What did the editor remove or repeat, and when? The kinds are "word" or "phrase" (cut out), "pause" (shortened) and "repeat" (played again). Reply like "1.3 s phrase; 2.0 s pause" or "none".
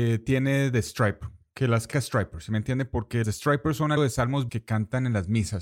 1.9 s word; 3.2 s word; 4.0 s word; 4.5 s word